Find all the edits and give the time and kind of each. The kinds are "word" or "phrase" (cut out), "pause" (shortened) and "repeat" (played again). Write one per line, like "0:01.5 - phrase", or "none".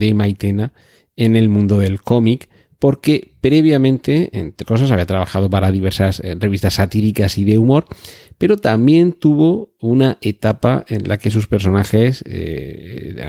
0:04.6 - word